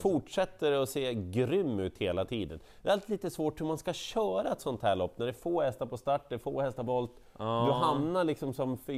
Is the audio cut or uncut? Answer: cut